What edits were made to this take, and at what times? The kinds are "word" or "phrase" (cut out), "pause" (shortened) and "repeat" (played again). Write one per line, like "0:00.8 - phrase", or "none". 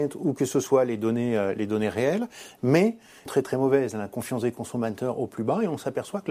0:03.3 - phrase